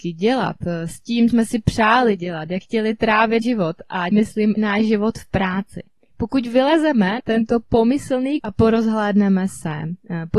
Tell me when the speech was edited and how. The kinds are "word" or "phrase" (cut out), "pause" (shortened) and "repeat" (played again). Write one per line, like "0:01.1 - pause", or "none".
0:01.3 - word
0:02.6 - word
0:03.4 - word
0:04.1 - word
0:04.6 - word
0:07.2 - word
0:08.4 - word